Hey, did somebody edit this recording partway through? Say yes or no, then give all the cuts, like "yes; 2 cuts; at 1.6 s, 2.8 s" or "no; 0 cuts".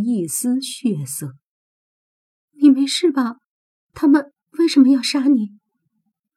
no; 0 cuts